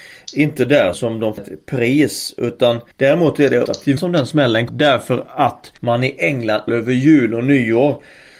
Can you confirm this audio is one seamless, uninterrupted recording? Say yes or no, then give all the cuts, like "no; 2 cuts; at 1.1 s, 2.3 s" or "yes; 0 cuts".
no; 8 cuts; at 0.9 s, 1.4 s, 2.9 s, 3.7 s, 4.0 s, 4.7 s, 5.8 s, 6.7 s